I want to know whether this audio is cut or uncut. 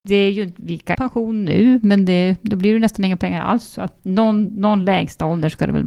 cut